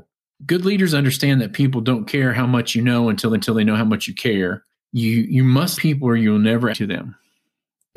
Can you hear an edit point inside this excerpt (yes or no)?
yes